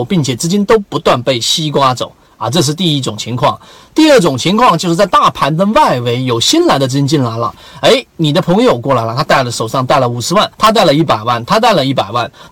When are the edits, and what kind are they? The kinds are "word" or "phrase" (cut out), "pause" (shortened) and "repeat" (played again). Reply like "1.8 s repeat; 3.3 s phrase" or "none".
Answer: 10.5 s pause